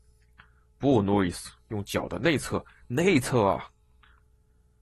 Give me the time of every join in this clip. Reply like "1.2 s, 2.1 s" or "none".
none